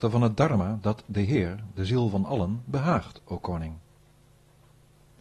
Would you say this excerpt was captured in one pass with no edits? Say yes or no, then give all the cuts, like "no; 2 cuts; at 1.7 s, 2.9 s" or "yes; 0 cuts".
yes; 0 cuts